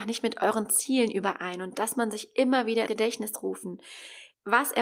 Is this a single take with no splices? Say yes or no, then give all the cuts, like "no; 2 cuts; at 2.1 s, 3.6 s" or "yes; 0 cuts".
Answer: no; 2 cuts; at 1.9 s, 2.9 s